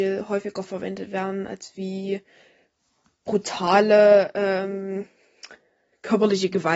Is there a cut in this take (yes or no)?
no